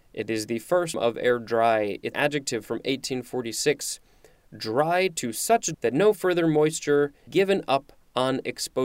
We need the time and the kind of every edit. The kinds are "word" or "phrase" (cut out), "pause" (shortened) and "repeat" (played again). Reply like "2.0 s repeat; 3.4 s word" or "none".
0.9 s word; 2.1 s word; 5.7 s word; 7.3 s word